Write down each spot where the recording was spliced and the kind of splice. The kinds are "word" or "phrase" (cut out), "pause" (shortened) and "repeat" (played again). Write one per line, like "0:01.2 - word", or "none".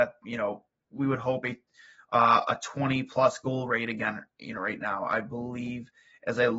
none

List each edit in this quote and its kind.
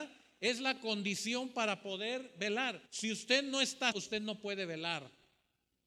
0:02.9 - pause
0:03.9 - word

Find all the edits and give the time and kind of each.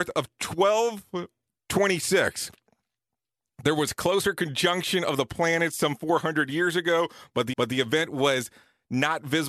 0:07.5 - repeat

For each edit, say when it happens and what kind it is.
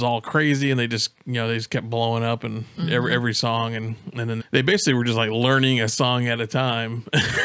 0:04.4 - phrase

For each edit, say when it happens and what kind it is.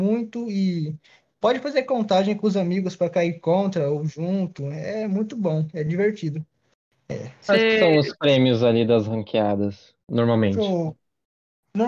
none

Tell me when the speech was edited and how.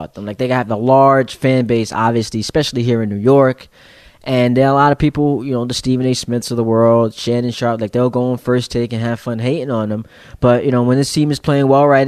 none

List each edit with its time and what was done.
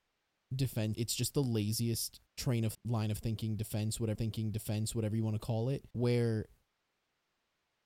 0:00.9 - phrase
0:02.3 - pause
0:02.7 - word
0:04.1 - repeat
0:05.9 - pause

